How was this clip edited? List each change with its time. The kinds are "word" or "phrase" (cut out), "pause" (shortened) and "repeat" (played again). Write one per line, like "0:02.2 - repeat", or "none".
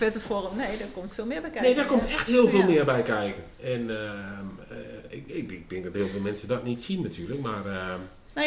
0:03.5 - pause